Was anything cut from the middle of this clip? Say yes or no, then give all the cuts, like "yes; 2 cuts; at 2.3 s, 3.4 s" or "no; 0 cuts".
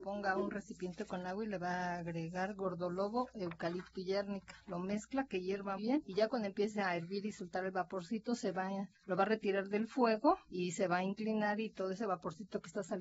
yes; 2 cuts; at 5.8 s, 8.9 s